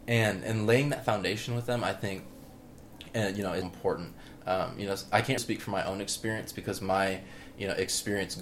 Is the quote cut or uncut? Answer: cut